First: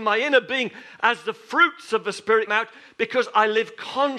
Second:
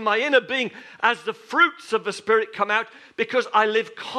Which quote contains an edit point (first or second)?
first